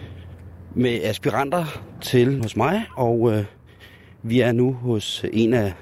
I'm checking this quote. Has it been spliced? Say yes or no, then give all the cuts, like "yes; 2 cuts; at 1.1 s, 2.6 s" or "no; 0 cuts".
yes; 1 cut; at 2.4 s